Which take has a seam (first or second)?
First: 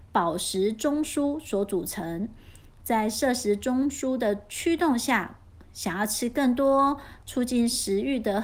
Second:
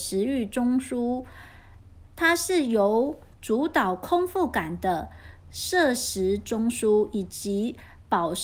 second